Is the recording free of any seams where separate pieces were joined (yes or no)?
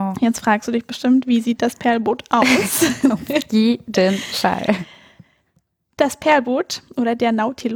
yes